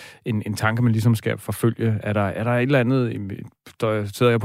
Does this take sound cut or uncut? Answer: uncut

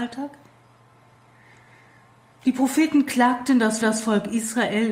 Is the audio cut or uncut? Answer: cut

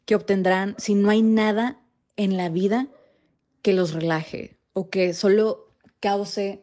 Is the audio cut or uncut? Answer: uncut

